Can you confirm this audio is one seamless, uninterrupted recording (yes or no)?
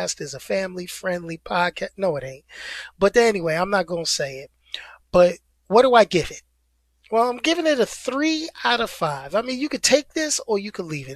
yes